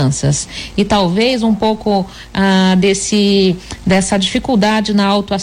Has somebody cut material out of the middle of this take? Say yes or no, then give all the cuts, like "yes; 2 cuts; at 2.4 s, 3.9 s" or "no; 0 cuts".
no; 0 cuts